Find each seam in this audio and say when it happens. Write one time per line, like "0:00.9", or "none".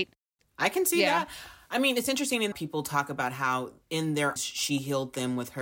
0:02.5
0:03.8
0:04.4